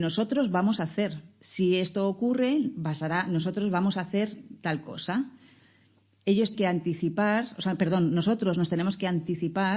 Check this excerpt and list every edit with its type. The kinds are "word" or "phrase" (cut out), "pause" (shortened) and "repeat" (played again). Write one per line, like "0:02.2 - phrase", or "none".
0:06.5 - word